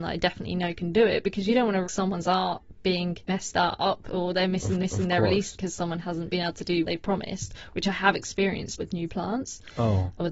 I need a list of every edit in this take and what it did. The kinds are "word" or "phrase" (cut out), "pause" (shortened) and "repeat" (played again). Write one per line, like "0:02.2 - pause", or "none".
0:01.8 - word
0:03.2 - pause
0:04.8 - repeat
0:05.5 - word
0:06.8 - word
0:08.8 - word